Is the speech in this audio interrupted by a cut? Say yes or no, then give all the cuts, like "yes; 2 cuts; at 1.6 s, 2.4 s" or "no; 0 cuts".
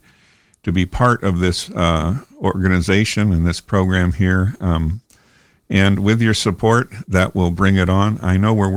no; 0 cuts